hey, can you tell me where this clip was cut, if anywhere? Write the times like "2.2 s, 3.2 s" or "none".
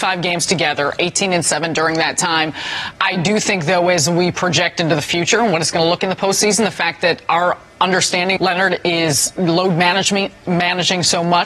6.0 s, 8.4 s